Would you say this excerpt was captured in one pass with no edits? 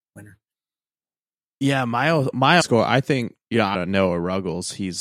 no; 3 cuts; at 2.6 s, 3.4 s, 3.7 s

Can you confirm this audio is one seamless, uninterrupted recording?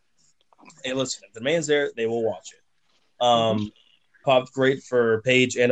no; 1 cut; at 4.2 s

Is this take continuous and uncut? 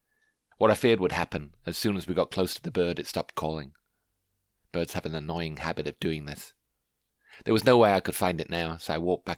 yes; 0 cuts

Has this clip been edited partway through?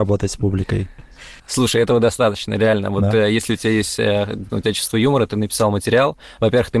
yes; 2 cuts; at 1.4 s, 4.5 s

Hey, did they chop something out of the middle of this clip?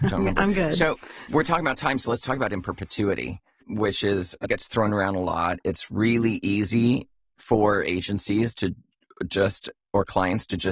yes; 1 cut; at 4.4 s

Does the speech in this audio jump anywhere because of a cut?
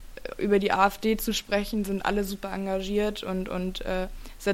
no; 0 cuts

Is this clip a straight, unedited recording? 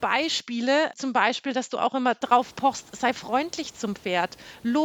yes; 0 cuts

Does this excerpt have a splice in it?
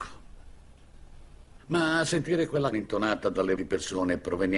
yes; 2 cuts; at 2.7 s, 3.6 s

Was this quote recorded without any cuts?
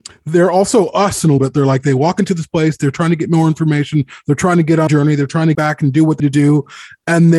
no; 4 cuts; at 1.4 s, 4.9 s, 5.5 s, 6.2 s

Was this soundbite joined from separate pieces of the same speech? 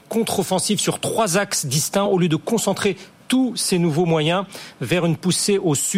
no; 0 cuts

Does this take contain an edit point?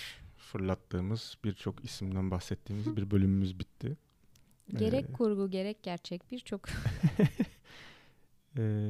no; 0 cuts

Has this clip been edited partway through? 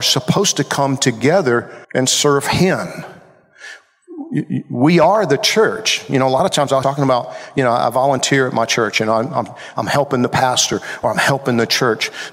yes; 2 cuts; at 1.8 s, 6.8 s

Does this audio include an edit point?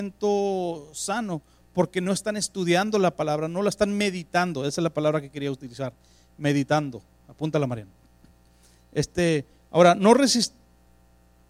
no; 0 cuts

